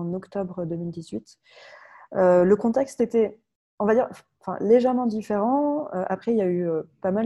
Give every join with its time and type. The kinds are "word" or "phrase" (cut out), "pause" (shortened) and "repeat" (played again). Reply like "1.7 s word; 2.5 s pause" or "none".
none

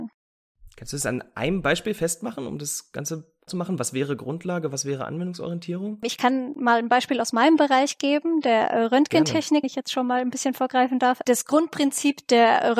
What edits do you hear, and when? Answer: 3.5 s phrase; 9.6 s word

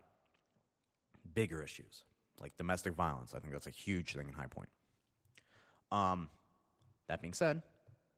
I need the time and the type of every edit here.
none

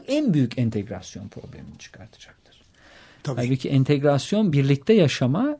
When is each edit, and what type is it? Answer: none

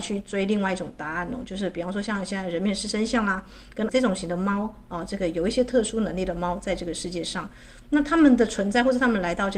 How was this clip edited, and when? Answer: 3.9 s word

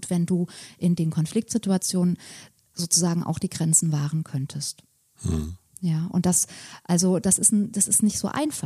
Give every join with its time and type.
none

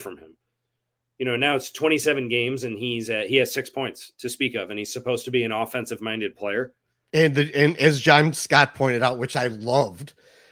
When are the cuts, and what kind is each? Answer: none

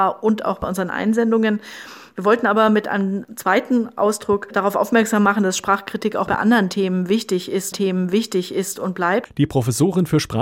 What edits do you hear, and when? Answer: 7.7 s repeat

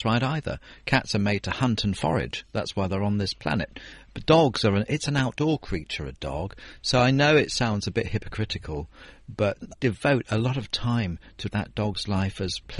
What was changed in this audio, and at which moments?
9.7 s word; 11.5 s phrase

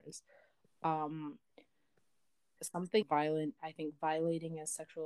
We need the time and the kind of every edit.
2.6 s word; 3.0 s word; 3.6 s word

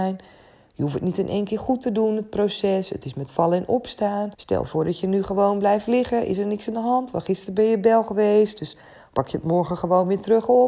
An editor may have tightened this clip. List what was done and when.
4.3 s pause

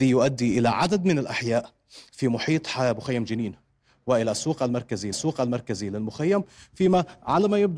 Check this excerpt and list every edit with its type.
5.1 s repeat

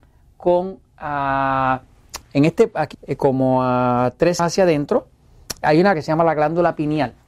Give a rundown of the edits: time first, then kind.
2.2 s word; 2.9 s word; 4.4 s word; 5.6 s word; 5.9 s word

